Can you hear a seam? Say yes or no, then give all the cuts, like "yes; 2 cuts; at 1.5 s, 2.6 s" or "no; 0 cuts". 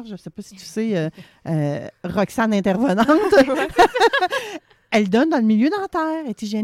no; 0 cuts